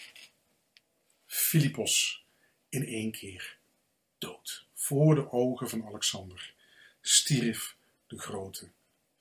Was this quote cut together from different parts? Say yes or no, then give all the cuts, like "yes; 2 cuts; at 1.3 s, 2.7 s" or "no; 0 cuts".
no; 0 cuts